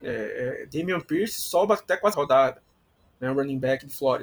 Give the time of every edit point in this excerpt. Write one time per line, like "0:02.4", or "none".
0:02.1

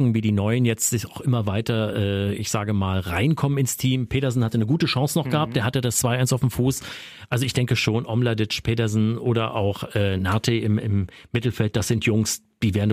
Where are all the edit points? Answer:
none

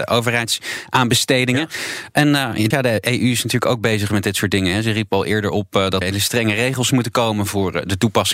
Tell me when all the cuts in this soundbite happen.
0:02.7
0:06.0

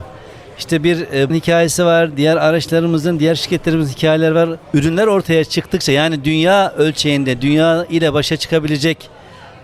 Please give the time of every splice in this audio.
0:01.3
0:04.6

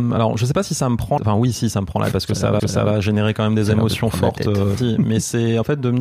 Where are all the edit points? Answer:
0:01.2
0:02.1
0:02.6
0:04.8

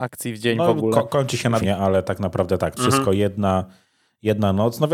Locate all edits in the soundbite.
0:01.6
0:02.8

